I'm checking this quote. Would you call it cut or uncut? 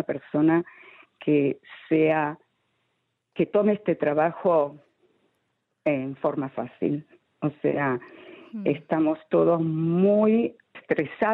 uncut